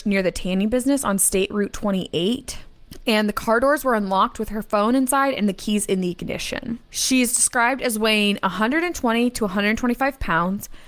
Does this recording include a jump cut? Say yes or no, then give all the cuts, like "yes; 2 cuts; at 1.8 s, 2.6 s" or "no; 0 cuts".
yes; 1 cut; at 6.8 s